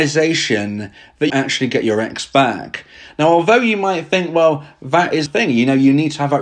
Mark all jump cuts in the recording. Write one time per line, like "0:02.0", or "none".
0:01.3
0:05.3